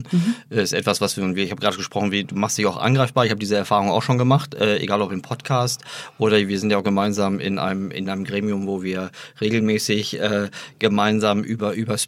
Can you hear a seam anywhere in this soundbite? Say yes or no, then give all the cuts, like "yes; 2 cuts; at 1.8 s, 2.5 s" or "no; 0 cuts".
no; 0 cuts